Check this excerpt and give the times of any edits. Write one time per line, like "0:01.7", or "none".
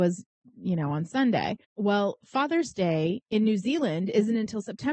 0:01.6